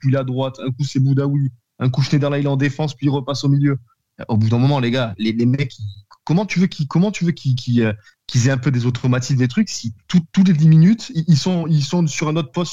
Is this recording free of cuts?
yes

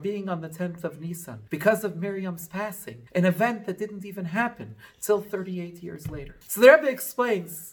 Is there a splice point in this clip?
yes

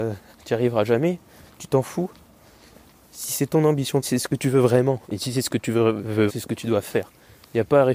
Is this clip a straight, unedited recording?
no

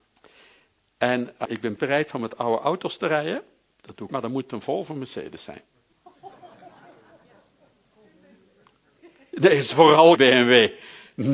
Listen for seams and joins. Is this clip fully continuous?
no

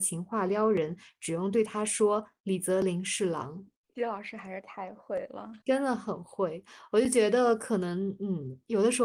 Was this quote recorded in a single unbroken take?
no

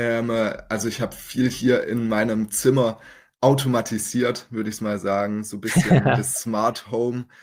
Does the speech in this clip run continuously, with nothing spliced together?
yes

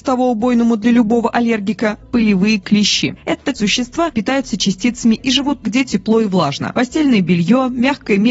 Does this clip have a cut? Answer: yes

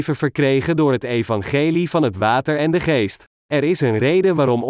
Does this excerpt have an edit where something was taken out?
yes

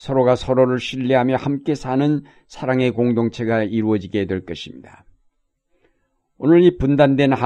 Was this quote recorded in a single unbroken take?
yes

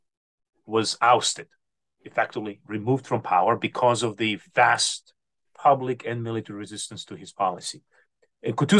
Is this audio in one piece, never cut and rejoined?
yes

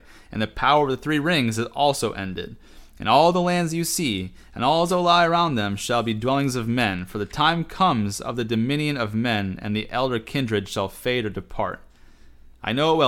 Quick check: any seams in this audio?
no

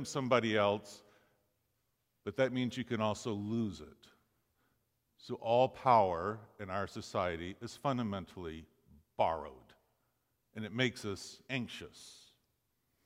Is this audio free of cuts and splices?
no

